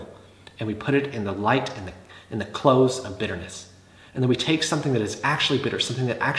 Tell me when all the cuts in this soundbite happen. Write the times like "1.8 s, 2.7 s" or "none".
none